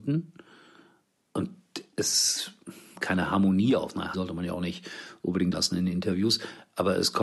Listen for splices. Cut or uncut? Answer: cut